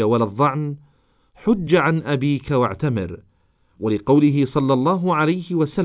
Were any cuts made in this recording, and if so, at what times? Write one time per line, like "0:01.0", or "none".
none